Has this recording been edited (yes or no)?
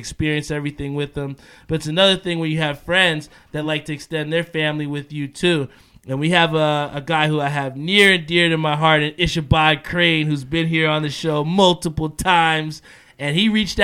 no